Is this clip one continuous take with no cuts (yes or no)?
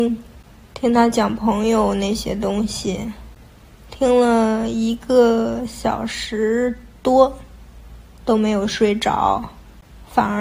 yes